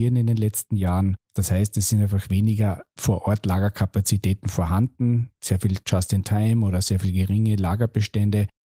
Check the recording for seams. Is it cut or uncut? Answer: cut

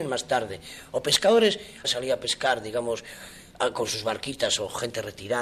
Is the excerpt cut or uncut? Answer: cut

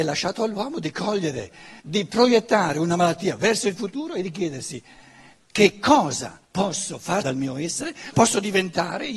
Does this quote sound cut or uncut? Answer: cut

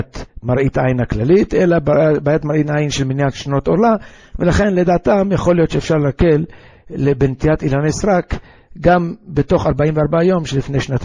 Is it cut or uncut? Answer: uncut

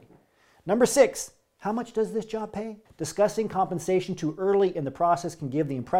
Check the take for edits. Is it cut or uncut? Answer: cut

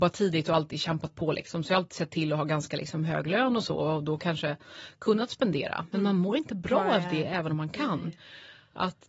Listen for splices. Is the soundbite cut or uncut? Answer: uncut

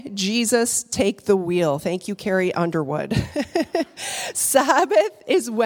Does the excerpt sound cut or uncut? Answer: uncut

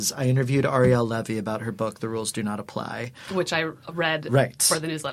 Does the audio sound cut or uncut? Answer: uncut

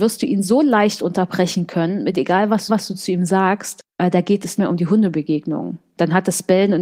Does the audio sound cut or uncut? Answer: cut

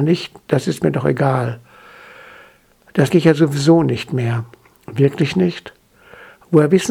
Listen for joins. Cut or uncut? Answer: cut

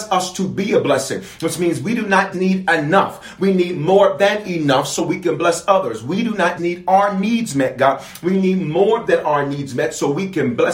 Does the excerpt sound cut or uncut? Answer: cut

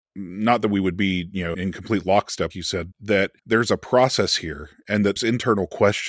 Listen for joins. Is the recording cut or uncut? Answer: cut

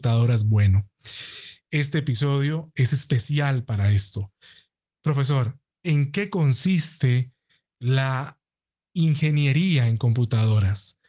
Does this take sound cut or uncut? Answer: uncut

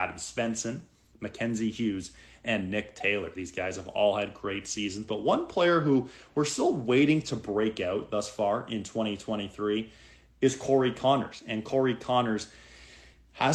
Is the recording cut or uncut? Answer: uncut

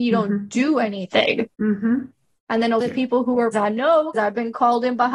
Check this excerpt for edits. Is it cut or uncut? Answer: cut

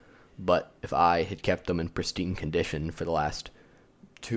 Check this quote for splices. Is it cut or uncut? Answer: uncut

